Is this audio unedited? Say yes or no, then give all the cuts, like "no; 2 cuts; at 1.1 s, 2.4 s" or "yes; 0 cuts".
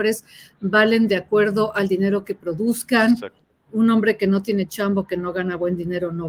yes; 0 cuts